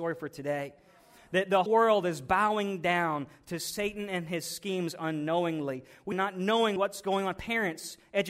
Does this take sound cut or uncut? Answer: cut